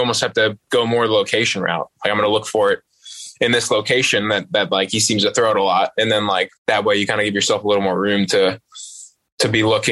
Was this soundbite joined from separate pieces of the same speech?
yes; 1 cut; at 6.6 s

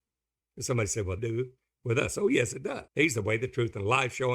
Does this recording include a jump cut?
yes; 2 cuts; at 1.2 s, 2.9 s

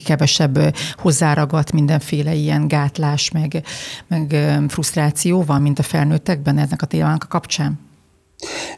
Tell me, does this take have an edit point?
no; 0 cuts

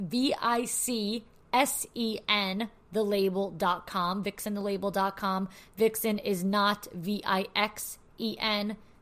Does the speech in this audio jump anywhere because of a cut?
no; 0 cuts

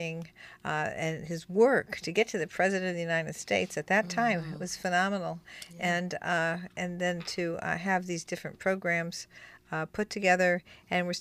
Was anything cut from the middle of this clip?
no; 0 cuts

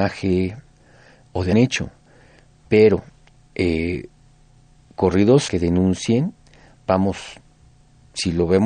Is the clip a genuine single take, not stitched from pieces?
no; 2 cuts; at 1.5 s, 5.5 s

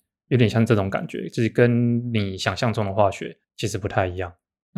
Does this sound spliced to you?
yes; 1 cut; at 3.4 s

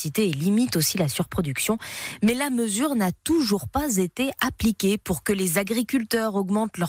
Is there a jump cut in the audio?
no; 0 cuts

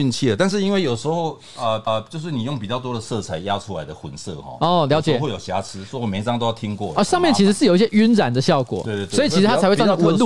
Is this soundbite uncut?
no; 1 cut; at 1.9 s

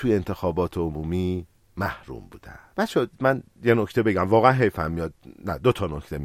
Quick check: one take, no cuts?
yes; 0 cuts

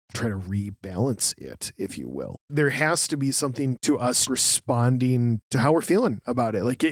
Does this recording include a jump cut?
yes; 2 cuts; at 2.4 s, 4.3 s

